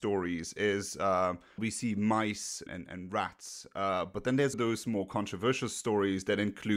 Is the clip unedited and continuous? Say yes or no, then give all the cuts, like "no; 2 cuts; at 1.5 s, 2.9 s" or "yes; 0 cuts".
no; 3 cuts; at 1.6 s, 2.7 s, 4.5 s